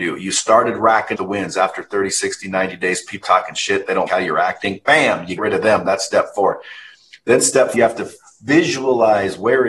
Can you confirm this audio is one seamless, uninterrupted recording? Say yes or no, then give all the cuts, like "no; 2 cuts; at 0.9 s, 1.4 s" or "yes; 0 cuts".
no; 5 cuts; at 1.2 s, 3.2 s, 4.1 s, 5.4 s, 7.7 s